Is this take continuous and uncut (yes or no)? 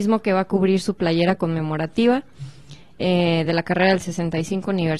yes